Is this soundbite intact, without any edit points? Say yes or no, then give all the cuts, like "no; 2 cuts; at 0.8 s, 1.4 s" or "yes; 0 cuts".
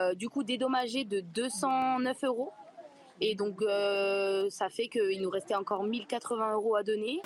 yes; 0 cuts